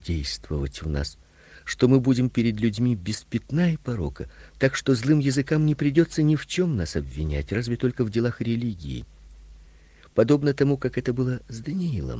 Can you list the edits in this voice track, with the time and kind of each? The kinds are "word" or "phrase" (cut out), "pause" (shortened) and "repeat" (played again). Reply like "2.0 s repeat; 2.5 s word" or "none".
none